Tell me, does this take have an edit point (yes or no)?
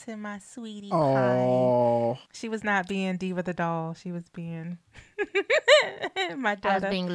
yes